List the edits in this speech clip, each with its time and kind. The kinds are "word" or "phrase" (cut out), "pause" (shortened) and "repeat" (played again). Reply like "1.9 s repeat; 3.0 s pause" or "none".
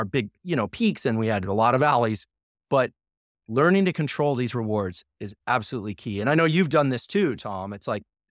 none